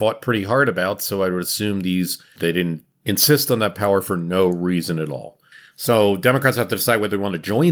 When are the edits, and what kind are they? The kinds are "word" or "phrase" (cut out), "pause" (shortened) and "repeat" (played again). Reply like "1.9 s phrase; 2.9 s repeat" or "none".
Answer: none